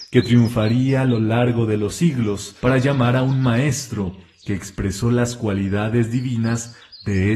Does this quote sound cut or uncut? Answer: cut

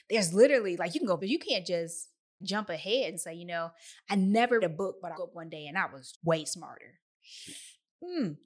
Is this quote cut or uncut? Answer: cut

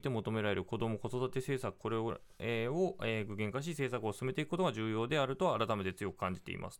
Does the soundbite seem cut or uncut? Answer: uncut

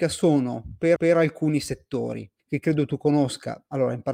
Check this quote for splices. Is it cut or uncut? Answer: cut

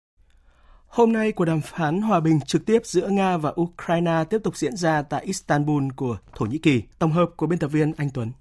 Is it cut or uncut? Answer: cut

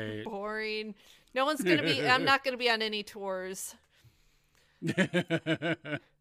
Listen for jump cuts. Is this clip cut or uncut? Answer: uncut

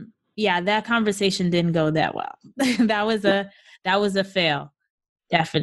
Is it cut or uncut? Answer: uncut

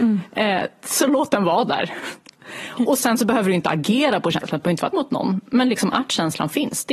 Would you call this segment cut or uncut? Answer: cut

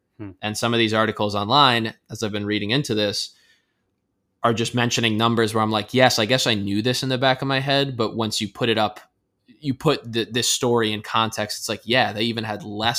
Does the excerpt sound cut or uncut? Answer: uncut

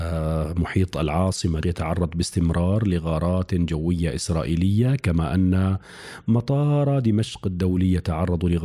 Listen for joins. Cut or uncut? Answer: cut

